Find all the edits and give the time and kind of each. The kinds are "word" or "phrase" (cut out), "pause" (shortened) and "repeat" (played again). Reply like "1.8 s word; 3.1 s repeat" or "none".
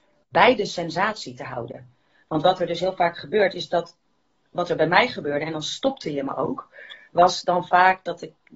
none

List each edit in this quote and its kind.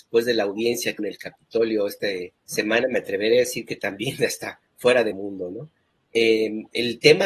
1.0 s word; 2.4 s pause; 4.7 s pause; 5.1 s word

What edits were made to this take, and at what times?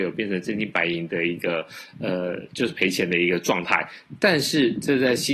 none

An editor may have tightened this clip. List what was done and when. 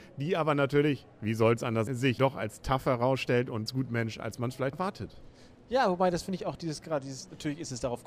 1.9 s word; 2.2 s word; 3.7 s word; 4.7 s word

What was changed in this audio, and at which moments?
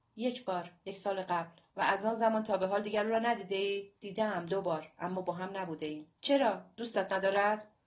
1.7 s pause; 4.0 s pause; 6.2 s pause

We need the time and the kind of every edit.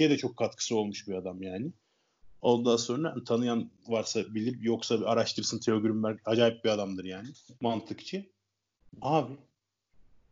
7.5 s pause

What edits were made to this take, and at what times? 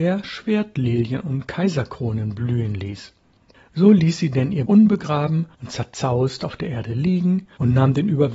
4.7 s word; 5.5 s pause

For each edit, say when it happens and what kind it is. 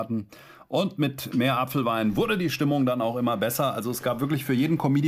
none

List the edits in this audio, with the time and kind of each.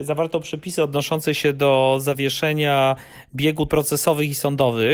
3.7 s word

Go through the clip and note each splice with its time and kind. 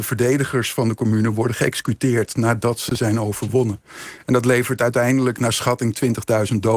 none

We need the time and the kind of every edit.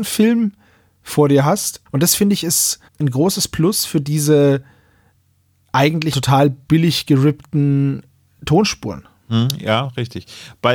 1.9 s pause; 2.9 s pause; 6.1 s word

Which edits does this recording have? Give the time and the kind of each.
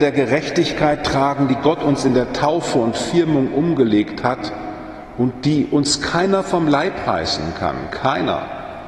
none

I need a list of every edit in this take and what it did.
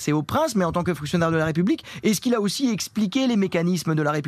none

